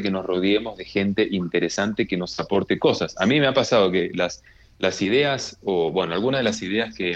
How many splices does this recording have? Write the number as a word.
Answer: zero